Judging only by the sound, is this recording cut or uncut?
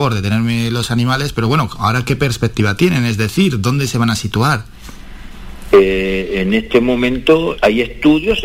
cut